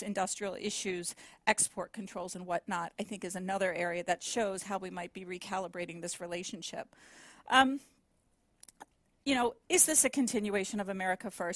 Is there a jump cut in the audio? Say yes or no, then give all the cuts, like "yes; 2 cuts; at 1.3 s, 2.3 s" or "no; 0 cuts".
no; 0 cuts